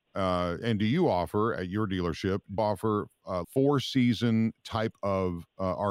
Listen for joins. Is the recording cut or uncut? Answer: cut